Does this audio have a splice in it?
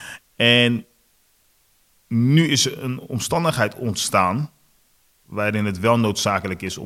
no; 0 cuts

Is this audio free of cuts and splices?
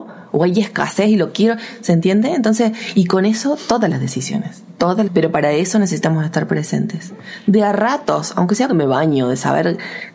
no; 2 cuts; at 5.1 s, 8.7 s

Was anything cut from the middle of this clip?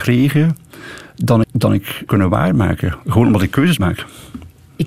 yes; 3 cuts; at 1.4 s, 2.1 s, 3.8 s

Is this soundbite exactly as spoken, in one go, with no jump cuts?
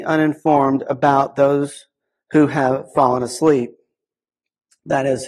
yes; 0 cuts

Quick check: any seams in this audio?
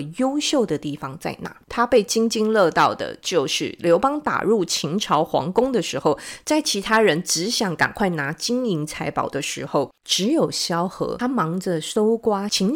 yes; 1 cut; at 1.6 s

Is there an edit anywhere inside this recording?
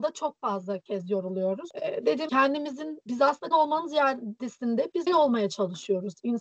yes; 3 cuts; at 2.3 s, 3.5 s, 5.1 s

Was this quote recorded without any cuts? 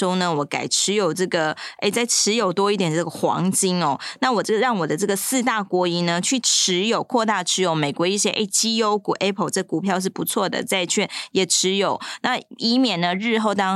yes; 0 cuts

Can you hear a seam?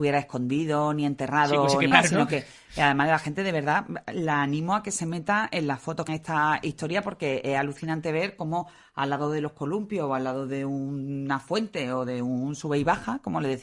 yes; 2 cuts; at 1.9 s, 6.1 s

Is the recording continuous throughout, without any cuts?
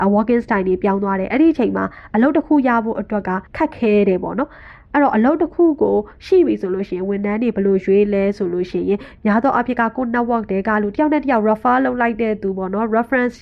no; 1 cut; at 3.5 s

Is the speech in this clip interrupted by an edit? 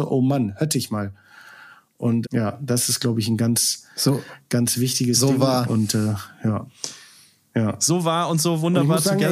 yes; 1 cut; at 2.2 s

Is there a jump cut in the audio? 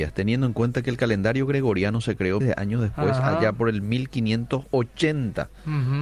yes; 1 cut; at 2.4 s

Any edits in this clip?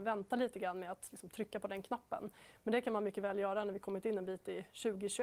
no; 0 cuts

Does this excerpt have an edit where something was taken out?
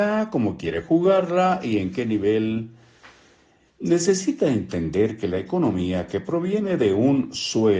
no; 0 cuts

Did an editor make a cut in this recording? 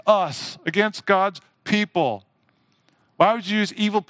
no; 0 cuts

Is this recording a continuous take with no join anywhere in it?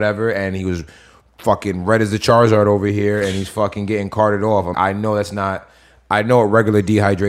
no; 1 cut; at 4.7 s

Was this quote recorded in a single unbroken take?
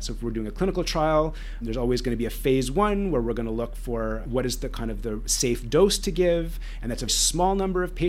no; 2 cuts; at 1.6 s, 7.1 s

